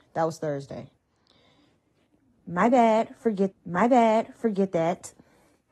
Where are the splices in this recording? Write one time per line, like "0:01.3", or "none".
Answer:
0:03.5